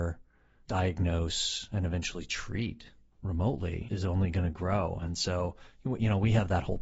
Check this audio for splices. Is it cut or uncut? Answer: cut